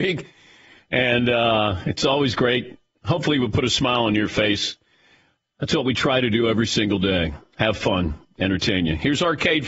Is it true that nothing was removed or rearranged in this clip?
yes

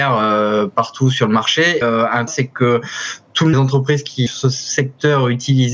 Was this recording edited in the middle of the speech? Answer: yes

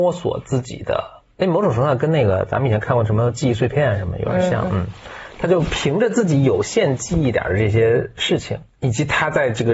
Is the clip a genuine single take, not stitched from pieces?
no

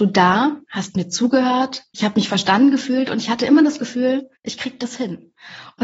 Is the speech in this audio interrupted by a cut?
yes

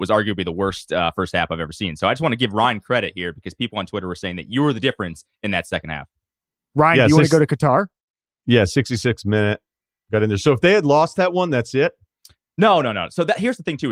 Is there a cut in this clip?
no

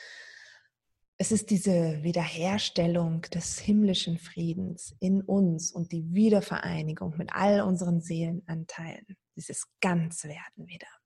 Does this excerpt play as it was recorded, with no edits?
yes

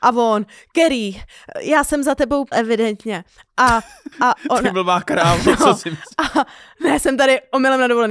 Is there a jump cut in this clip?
yes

